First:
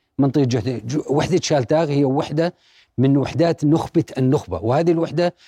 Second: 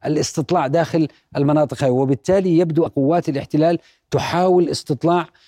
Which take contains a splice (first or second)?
second